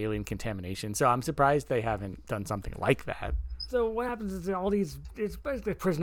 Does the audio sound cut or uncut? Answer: uncut